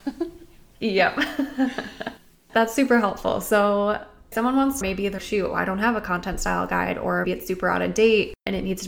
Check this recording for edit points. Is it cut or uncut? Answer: cut